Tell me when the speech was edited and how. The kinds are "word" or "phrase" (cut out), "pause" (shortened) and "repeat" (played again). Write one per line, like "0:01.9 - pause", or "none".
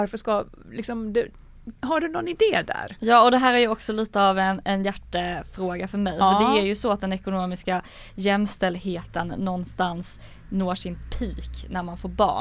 none